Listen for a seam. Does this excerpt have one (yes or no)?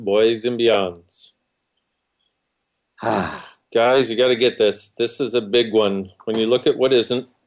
no